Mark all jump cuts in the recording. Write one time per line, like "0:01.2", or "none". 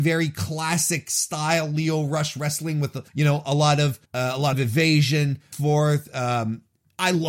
0:03.1
0:04.1
0:04.5
0:05.5